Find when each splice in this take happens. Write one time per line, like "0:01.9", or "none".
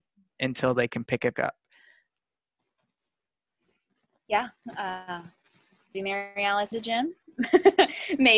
0:01.3
0:05.9
0:06.7